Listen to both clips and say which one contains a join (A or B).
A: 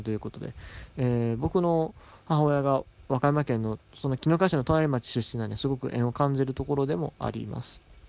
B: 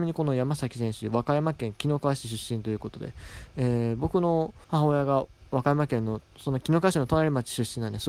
B